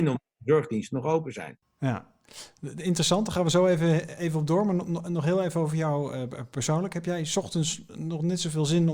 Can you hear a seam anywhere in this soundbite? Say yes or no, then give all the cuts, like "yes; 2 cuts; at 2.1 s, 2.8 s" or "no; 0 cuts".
no; 0 cuts